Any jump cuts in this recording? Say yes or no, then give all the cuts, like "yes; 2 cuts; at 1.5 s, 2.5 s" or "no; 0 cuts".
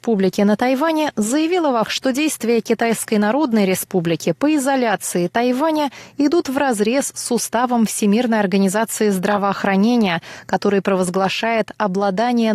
yes; 1 cut; at 1.8 s